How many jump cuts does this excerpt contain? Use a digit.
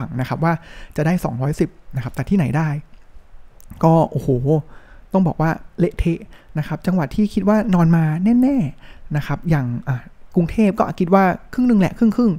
0